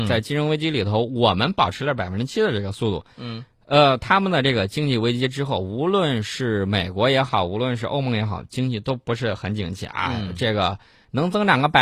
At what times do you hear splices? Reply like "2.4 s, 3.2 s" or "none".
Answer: none